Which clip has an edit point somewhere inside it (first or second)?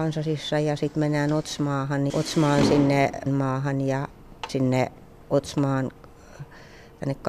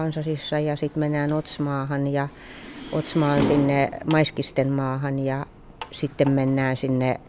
first